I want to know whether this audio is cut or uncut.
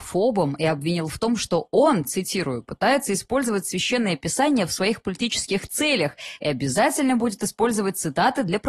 uncut